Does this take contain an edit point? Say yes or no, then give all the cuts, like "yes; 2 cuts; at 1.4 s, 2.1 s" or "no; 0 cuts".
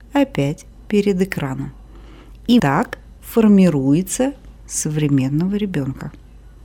yes; 2 cuts; at 2.6 s, 4.6 s